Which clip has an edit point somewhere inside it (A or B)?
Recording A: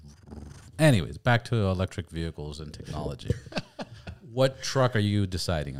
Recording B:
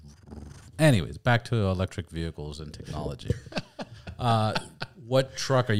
A